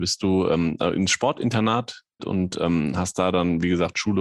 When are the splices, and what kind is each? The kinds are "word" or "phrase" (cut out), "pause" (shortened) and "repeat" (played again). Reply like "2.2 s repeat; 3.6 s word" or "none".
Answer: 2.2 s word